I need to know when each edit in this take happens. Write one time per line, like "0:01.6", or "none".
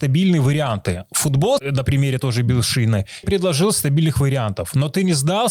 0:01.6
0:03.2